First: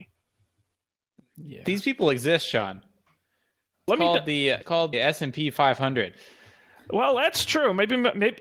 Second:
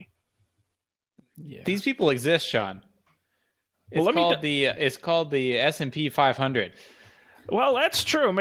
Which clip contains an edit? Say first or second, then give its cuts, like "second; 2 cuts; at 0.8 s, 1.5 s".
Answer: first; 3 cuts; at 3.9 s, 4.6 s, 4.9 s